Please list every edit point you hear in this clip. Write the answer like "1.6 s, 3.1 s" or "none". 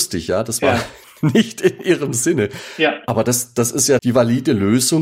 4.0 s